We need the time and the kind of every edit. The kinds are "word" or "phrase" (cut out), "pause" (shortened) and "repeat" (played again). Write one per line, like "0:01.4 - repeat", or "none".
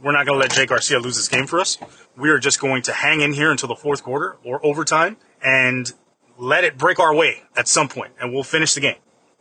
0:02.0 - pause
0:05.2 - pause